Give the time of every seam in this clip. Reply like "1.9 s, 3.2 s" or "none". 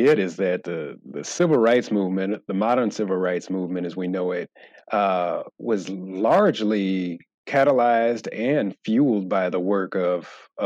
none